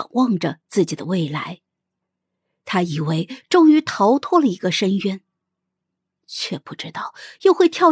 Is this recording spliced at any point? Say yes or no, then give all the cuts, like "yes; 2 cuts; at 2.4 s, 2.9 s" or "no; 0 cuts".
no; 0 cuts